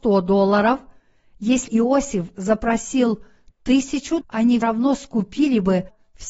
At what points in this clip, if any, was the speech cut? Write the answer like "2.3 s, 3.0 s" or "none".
1.7 s, 4.2 s, 4.6 s